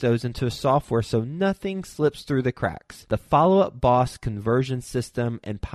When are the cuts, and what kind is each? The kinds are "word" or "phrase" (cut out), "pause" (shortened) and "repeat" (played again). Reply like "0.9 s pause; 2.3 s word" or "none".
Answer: none